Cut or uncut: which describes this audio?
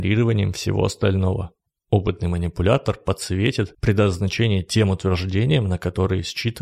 uncut